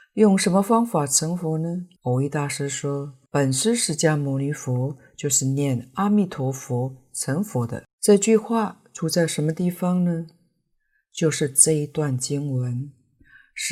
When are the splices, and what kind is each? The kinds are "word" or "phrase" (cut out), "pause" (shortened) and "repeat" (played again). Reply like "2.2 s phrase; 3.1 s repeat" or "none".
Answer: 2.0 s pause; 3.3 s pause; 8.0 s pause